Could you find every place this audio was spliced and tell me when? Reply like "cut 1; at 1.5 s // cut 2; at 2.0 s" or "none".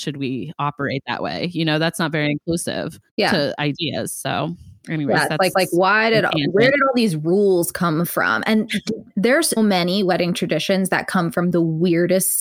cut 1; at 3.1 s // cut 2; at 5.5 s // cut 3; at 9.6 s